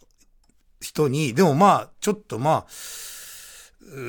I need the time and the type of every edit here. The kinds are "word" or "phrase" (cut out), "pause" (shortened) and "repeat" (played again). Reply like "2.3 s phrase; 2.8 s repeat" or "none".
none